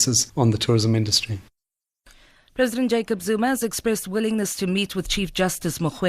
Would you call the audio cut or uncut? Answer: uncut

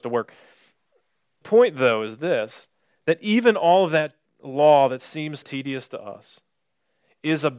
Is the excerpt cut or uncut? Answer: cut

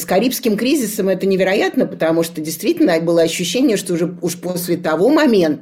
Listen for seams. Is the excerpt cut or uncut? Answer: uncut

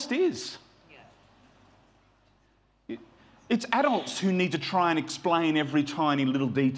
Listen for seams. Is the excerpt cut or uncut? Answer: uncut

